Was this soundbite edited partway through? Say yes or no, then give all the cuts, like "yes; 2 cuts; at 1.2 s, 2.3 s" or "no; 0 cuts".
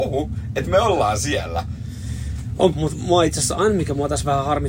yes; 1 cut; at 2.7 s